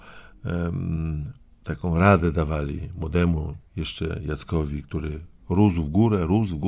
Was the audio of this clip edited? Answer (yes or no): no